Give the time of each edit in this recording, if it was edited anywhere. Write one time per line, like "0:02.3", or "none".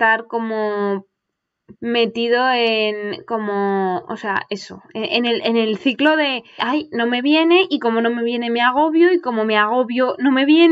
0:01.8
0:06.6